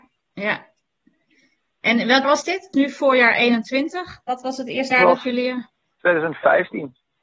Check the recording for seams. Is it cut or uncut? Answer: cut